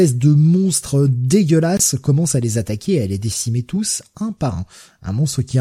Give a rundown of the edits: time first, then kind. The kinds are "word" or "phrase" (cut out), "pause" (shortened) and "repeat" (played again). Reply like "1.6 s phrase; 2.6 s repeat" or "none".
none